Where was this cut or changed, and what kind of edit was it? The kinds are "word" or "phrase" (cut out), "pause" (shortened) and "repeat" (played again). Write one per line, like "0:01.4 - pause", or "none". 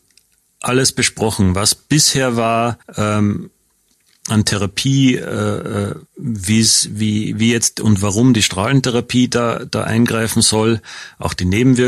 0:02.8 - pause
0:06.1 - pause